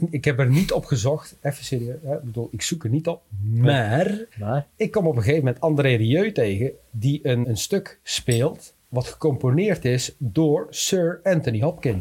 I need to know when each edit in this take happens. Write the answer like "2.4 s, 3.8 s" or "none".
4.3 s, 7.4 s, 8.8 s